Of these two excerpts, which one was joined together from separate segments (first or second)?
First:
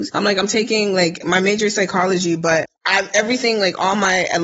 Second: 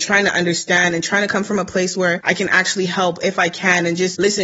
first